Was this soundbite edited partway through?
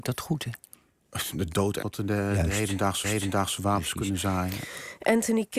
yes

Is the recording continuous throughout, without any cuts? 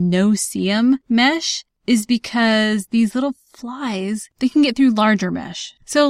yes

